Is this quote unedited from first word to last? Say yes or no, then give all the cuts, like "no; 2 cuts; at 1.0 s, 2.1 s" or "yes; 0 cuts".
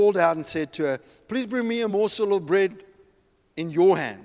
yes; 0 cuts